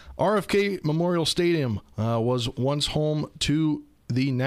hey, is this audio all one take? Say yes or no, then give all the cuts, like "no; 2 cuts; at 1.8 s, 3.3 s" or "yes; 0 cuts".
yes; 0 cuts